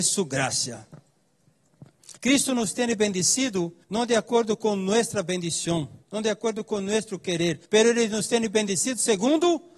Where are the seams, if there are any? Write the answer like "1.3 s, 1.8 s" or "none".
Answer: 2.2 s, 3.8 s, 6.0 s, 7.6 s